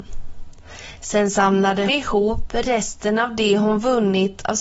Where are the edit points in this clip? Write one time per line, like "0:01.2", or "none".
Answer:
0:01.9